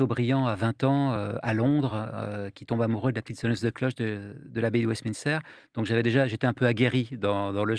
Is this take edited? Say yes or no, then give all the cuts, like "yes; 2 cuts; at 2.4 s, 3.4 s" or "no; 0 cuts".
no; 0 cuts